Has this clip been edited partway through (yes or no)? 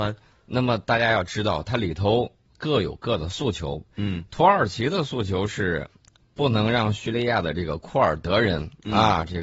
no